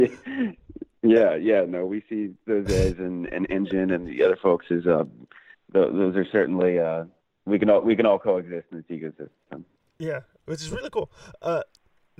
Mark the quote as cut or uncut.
cut